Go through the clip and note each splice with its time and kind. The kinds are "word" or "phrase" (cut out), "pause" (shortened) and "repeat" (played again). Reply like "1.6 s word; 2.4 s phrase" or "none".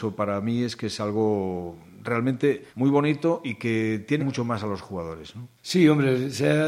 2.7 s pause; 4.2 s phrase; 5.6 s pause